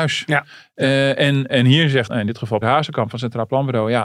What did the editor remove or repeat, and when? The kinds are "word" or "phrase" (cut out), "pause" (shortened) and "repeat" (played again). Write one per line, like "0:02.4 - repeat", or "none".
0:01.5 - word
0:02.1 - word
0:02.6 - word

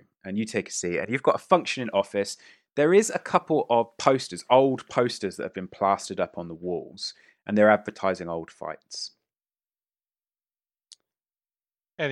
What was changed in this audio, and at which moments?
none

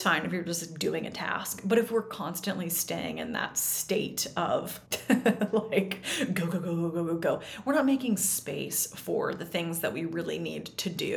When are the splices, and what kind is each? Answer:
0:04.9 - pause

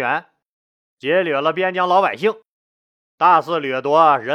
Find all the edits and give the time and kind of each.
none

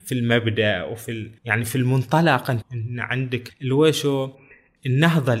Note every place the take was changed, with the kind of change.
0:01.4 - pause
0:02.6 - word
0:03.5 - word

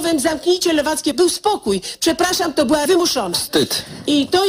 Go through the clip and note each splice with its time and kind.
0:01.1 - word
0:02.9 - word

